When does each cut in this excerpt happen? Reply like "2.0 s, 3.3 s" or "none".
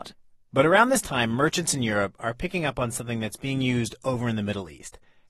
none

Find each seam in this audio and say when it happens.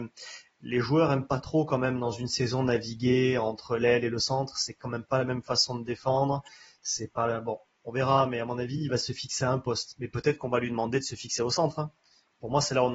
none

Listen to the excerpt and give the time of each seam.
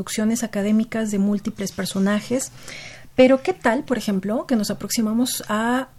none

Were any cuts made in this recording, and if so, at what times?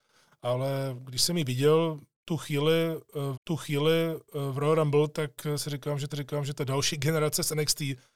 3.3 s, 6.1 s

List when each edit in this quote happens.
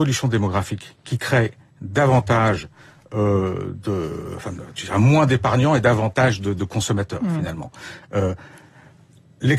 none

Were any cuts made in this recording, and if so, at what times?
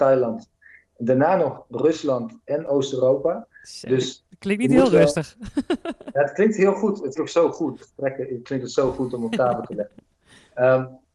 7.1 s, 7.8 s

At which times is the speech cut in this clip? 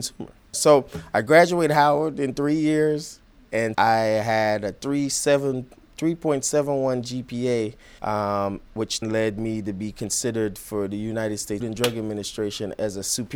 3.7 s, 8.0 s, 9.0 s, 11.6 s

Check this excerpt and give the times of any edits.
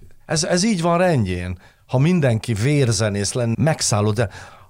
3.5 s

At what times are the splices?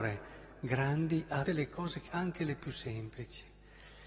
1.5 s, 2.1 s

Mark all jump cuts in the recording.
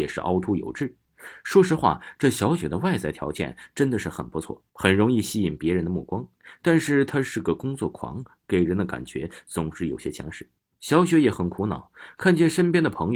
4.7 s, 10.6 s

